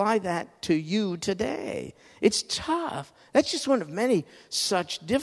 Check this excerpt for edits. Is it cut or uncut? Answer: uncut